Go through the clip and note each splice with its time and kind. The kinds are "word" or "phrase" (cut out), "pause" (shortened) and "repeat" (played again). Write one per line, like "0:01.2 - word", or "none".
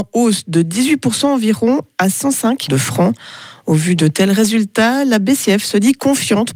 0:02.7 - word